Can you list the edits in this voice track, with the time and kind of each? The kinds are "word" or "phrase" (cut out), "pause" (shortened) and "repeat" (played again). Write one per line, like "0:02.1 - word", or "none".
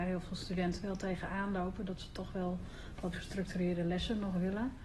0:03.1 - word